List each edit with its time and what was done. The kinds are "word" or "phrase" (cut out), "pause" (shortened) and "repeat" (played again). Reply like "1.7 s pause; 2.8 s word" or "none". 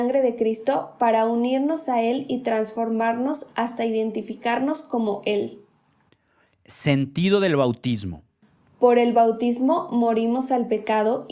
none

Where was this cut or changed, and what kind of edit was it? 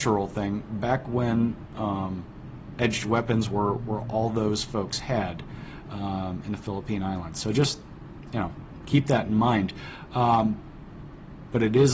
none

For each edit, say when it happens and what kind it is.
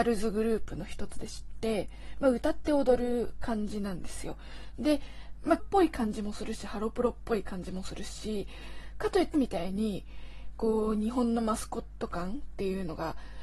5.6 s word; 9.3 s word

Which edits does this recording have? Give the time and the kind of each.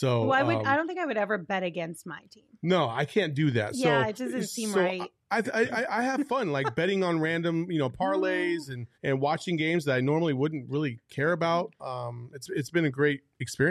4.2 s word; 8.9 s pause

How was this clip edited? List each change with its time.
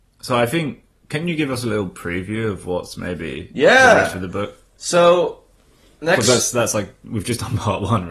none

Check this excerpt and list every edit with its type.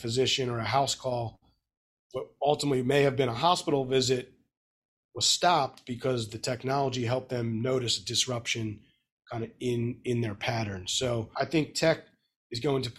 none

